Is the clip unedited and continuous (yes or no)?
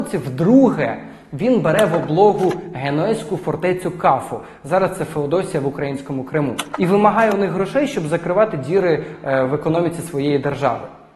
yes